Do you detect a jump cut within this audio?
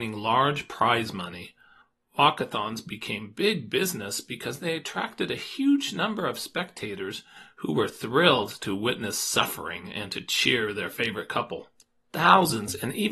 no; 0 cuts

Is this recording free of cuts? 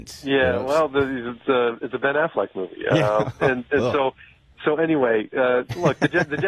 yes; 0 cuts

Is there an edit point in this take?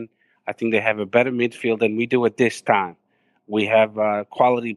no; 0 cuts

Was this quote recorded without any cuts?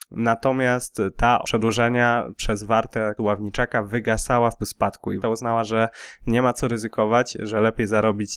no; 4 cuts; at 1.4 s, 3.2 s, 4.6 s, 5.2 s

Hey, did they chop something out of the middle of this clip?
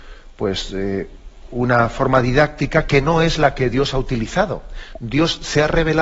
no; 0 cuts

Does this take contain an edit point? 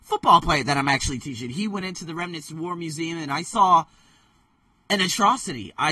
no; 0 cuts

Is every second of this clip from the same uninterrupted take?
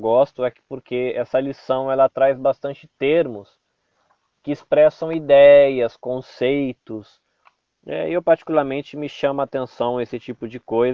yes; 0 cuts

